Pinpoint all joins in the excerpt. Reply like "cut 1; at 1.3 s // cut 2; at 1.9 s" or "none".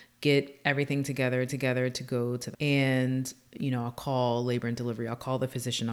cut 1; at 1.5 s // cut 2; at 2.5 s